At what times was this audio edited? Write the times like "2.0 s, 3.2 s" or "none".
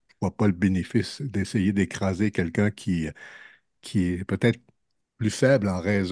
none